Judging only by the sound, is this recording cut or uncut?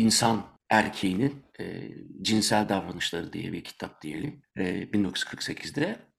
uncut